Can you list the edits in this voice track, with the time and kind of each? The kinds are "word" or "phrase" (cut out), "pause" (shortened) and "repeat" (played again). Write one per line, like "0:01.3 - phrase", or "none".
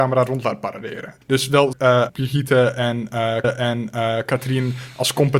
0:01.2 - pause
0:01.7 - word
0:02.1 - word
0:03.4 - repeat